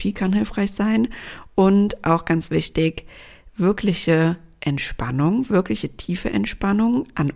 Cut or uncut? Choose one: uncut